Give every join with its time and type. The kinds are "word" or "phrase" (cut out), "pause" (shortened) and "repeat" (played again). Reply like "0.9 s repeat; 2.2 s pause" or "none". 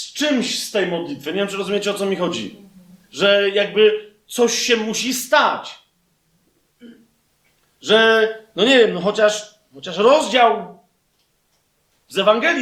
none